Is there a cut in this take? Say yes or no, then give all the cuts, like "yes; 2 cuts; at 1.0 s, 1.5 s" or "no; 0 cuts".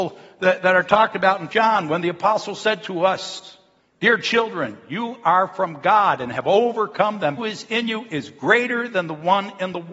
yes; 3 cuts; at 1.5 s, 3.8 s, 7.4 s